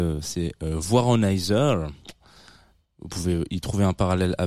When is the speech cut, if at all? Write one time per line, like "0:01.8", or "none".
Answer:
none